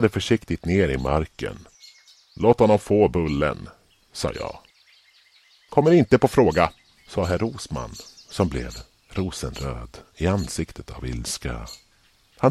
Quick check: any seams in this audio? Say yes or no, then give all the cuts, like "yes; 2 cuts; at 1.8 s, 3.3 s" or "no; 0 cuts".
no; 0 cuts